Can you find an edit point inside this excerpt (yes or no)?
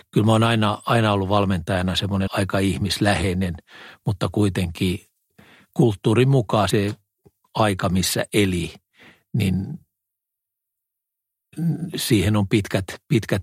yes